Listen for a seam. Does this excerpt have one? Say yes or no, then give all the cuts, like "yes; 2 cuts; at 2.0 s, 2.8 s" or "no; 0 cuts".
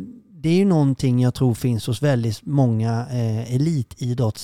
no; 0 cuts